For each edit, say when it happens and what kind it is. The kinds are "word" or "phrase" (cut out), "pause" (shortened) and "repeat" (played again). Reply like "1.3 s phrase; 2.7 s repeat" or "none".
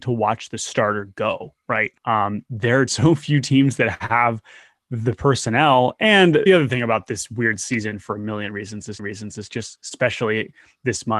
2.0 s pause; 2.9 s word; 6.5 s word; 9.0 s repeat